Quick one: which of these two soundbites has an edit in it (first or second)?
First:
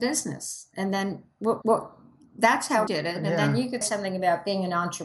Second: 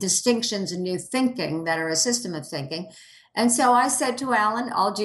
first